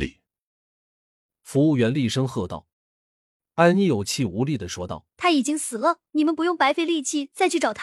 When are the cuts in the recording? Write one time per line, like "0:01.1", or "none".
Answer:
0:02.7
0:05.1
0:06.1